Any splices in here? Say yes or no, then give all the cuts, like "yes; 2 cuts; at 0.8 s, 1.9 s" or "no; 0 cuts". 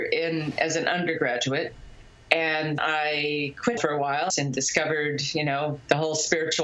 yes; 3 cuts; at 2.8 s, 3.8 s, 4.3 s